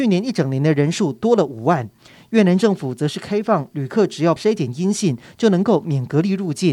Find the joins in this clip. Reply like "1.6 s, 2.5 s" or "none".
4.4 s